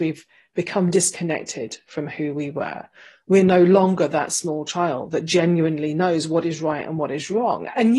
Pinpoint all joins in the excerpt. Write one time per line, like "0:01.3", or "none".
none